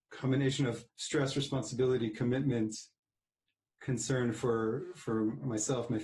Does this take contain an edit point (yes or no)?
no